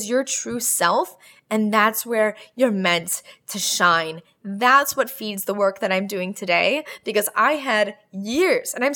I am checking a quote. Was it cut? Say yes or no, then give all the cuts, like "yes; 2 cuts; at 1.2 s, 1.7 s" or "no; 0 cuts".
no; 0 cuts